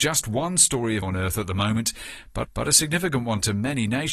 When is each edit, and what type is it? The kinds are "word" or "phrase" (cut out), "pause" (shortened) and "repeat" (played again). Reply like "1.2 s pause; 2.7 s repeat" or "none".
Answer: 1.0 s word; 2.4 s repeat